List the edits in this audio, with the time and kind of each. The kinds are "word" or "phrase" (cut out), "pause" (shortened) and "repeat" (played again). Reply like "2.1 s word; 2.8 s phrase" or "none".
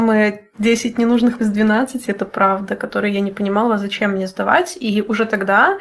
1.4 s word